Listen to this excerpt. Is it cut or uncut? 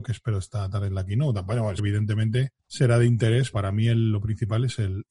cut